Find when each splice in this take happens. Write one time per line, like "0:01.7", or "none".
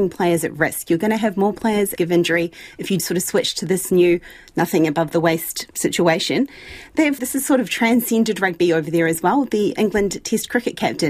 0:02.0
0:03.0
0:05.7
0:07.2
0:09.8

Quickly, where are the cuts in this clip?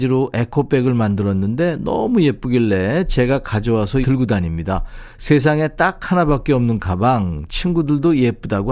0:04.0

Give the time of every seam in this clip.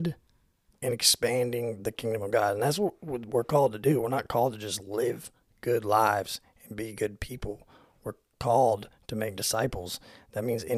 none

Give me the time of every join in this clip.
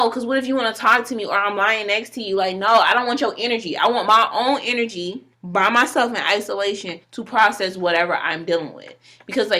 0:05.3
0:07.0

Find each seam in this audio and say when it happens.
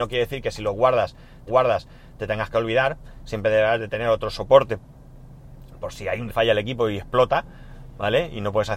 0:01.5
0:06.3

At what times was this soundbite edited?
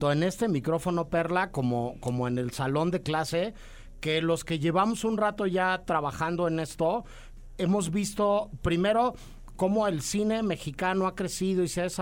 none

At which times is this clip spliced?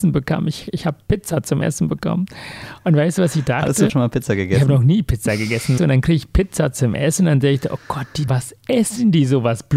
0:03.9
0:05.8
0:08.3

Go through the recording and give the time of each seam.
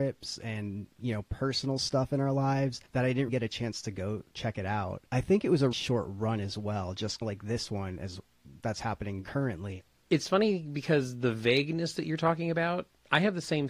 0:00.9
0:02.9
0:03.3
0:05.1
0:05.7
0:07.2

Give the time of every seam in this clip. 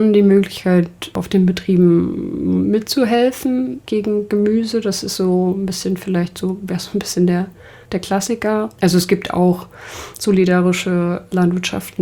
none

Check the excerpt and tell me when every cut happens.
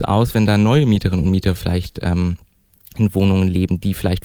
none

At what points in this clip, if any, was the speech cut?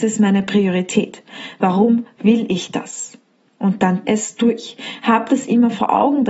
0:04.0

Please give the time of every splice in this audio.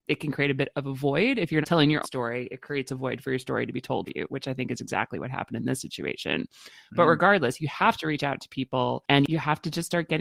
0:01.6
0:02.0
0:04.1

